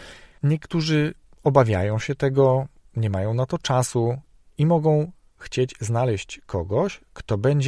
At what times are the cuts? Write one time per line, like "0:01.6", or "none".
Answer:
none